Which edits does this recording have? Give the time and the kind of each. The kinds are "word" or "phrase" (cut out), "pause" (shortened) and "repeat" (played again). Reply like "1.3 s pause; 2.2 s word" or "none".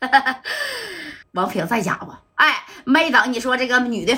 1.2 s pause; 2.3 s pause

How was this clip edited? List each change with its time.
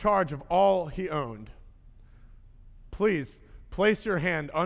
none

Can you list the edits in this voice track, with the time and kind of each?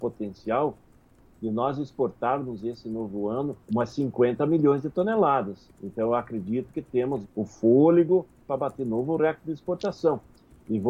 3.6 s pause; 5.7 s pause; 7.2 s word; 8.5 s phrase

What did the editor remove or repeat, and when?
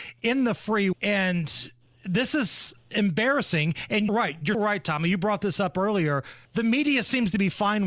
0.9 s word; 1.9 s pause; 4.1 s word; 4.5 s word; 6.4 s pause

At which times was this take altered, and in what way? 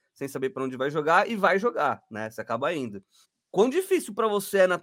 3.2 s pause

